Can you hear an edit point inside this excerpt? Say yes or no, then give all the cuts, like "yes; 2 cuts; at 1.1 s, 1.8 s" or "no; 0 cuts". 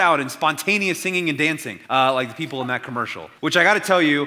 yes; 2 cuts; at 1.8 s, 3.4 s